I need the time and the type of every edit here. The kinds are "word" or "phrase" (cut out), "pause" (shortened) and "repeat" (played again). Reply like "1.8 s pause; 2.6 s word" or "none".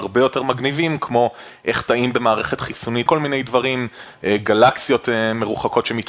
3.1 s word